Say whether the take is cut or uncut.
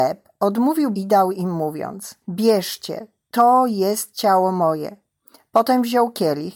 cut